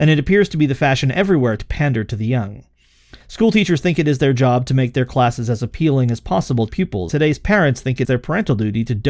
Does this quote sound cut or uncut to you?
cut